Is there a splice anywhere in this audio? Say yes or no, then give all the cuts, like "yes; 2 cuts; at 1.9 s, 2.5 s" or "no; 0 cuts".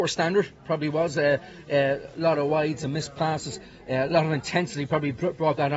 no; 0 cuts